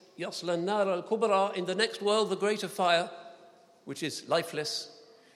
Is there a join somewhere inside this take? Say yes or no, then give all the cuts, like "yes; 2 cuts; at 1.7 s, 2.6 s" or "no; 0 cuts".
no; 0 cuts